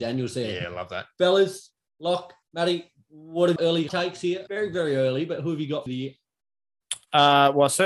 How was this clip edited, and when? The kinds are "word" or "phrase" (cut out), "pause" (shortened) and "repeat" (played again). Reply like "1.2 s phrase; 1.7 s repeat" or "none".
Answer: 2.4 s pause; 3.6 s phrase; 3.9 s word; 4.5 s word; 5.9 s phrase